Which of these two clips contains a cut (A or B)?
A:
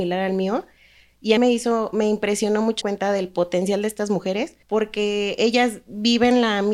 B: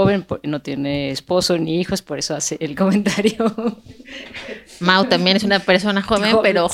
A